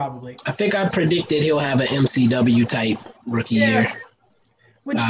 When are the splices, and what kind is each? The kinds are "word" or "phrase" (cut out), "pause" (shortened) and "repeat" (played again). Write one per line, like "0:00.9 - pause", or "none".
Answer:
none